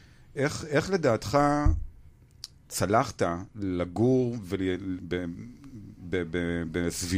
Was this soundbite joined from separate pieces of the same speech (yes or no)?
no